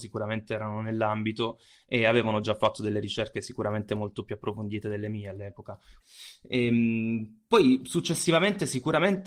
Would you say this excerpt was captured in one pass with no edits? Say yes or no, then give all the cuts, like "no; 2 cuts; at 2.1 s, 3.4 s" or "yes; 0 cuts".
yes; 0 cuts